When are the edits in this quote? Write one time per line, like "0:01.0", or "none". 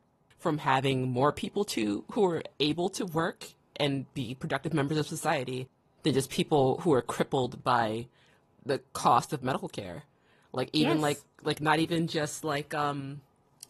none